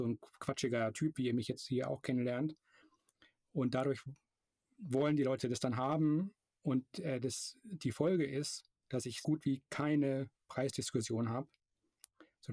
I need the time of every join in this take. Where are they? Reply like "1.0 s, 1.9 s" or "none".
9.2 s